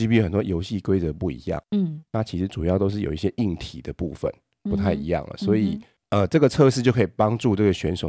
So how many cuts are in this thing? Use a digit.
0